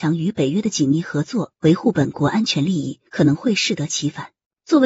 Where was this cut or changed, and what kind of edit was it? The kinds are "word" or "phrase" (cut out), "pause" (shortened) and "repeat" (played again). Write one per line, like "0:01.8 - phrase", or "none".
0:03.1 - pause